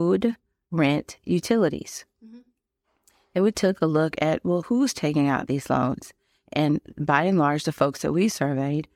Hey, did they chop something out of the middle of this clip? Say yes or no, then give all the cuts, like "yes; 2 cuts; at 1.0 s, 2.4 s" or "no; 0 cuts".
no; 0 cuts